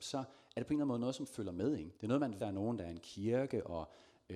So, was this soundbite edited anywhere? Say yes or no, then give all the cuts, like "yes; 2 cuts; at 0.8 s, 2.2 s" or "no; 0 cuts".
yes; 2 cuts; at 2.0 s, 2.4 s